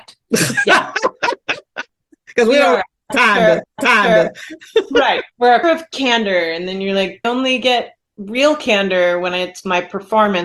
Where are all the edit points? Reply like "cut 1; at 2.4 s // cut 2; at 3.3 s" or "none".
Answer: cut 1; at 3.6 s // cut 2; at 5.3 s // cut 3; at 5.6 s // cut 4; at 7.2 s